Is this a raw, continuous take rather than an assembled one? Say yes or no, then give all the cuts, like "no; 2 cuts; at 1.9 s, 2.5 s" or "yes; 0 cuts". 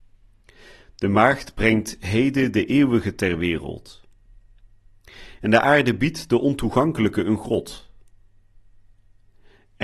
yes; 0 cuts